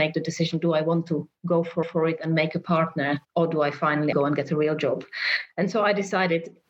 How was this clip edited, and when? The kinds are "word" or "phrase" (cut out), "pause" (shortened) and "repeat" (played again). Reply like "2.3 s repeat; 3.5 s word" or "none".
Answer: 1.8 s repeat; 3.2 s pause; 4.1 s word